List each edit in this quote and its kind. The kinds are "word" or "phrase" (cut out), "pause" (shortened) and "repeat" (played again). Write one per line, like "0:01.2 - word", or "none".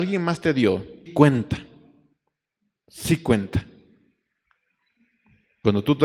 0:01.1 - word